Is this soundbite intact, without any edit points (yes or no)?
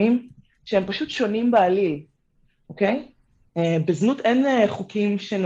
yes